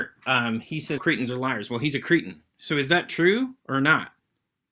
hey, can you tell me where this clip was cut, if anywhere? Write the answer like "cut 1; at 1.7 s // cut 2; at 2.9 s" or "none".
cut 1; at 1.0 s // cut 2; at 3.6 s